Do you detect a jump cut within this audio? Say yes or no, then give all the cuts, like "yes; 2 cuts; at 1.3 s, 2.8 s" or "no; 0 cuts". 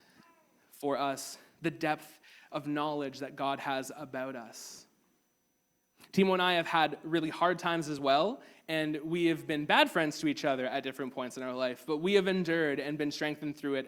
no; 0 cuts